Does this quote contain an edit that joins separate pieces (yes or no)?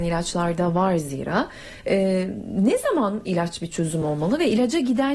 no